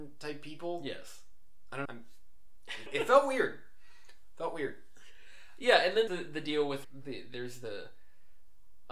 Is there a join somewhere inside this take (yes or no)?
yes